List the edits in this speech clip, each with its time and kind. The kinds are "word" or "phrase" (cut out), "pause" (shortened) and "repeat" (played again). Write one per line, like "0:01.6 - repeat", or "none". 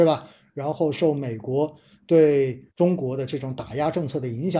0:02.7 - pause